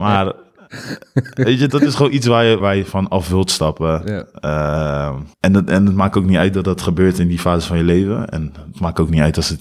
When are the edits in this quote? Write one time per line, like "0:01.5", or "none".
0:01.7
0:02.6
0:05.3